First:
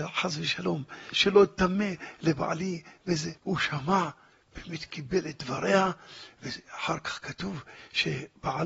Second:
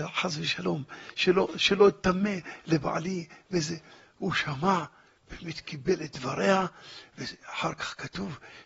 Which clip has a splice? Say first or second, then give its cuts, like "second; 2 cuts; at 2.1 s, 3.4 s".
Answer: first; 2 cuts; at 1.1 s, 3.4 s